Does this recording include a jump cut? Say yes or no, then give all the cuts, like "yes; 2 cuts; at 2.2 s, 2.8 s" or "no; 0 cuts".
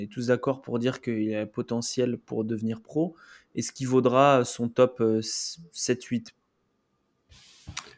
no; 0 cuts